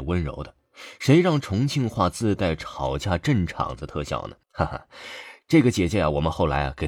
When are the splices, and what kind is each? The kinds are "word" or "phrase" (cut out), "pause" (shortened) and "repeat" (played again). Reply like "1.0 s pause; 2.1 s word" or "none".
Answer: 4.4 s pause